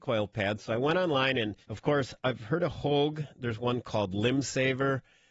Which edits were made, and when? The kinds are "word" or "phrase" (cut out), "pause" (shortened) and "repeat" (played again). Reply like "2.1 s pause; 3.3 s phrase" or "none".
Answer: 1.6 s pause